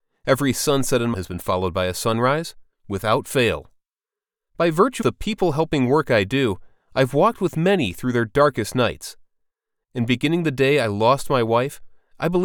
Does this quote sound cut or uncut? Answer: cut